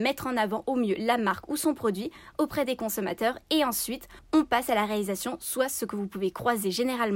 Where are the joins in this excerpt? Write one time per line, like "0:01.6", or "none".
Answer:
none